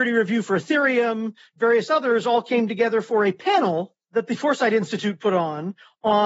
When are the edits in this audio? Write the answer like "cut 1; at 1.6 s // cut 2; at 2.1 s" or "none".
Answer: none

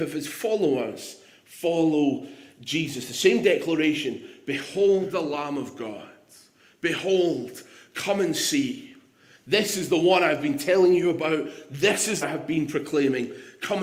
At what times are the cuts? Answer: cut 1; at 12.2 s

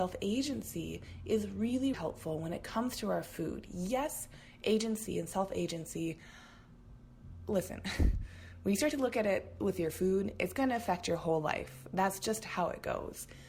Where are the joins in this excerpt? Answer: cut 1; at 1.9 s

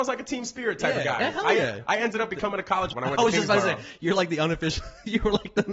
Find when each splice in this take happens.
cut 1; at 2.9 s

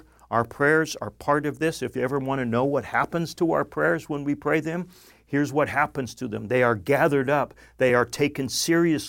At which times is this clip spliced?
none

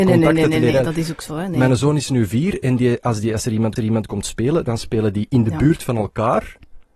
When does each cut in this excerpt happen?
cut 1; at 3.8 s

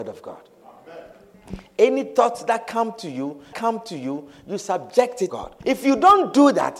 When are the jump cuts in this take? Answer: cut 1; at 3.5 s // cut 2; at 5.3 s // cut 3; at 5.6 s

